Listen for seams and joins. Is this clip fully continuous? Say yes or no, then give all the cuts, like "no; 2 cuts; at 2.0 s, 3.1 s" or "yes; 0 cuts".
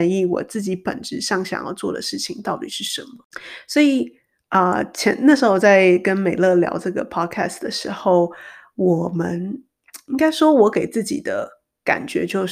yes; 0 cuts